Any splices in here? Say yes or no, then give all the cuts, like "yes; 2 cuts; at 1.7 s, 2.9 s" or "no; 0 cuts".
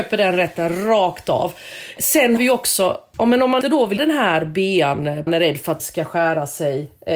yes; 5 cuts; at 2.4 s, 3.6 s, 4.0 s, 5.3 s, 5.8 s